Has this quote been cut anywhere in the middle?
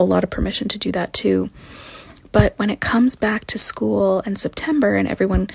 no; 0 cuts

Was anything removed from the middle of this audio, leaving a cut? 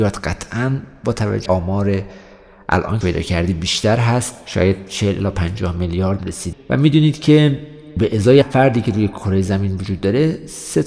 yes; 5 cuts; at 1.5 s, 3.0 s, 6.2 s, 6.5 s, 8.4 s

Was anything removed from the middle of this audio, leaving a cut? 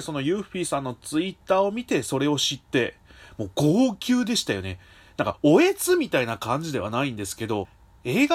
no; 0 cuts

